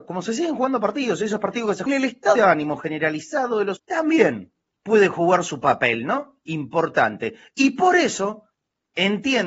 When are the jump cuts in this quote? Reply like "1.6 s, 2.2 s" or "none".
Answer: 1.9 s, 2.4 s, 3.8 s, 4.7 s